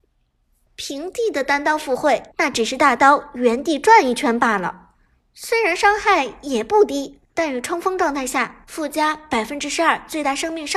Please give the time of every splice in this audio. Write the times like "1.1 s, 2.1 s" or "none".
2.3 s, 7.3 s